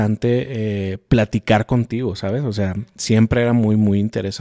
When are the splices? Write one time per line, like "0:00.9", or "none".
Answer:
none